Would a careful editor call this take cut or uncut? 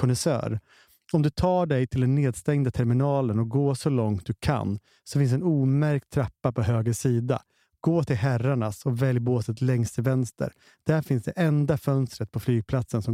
uncut